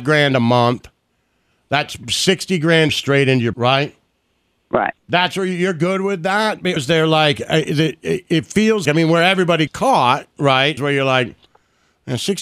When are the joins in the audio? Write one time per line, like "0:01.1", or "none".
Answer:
0:02.9
0:03.5
0:06.8
0:08.9
0:09.7
0:10.8

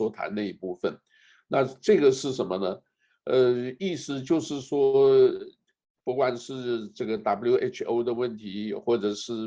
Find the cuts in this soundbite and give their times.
none

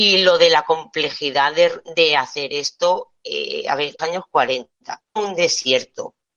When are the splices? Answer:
0:04.0
0:05.1

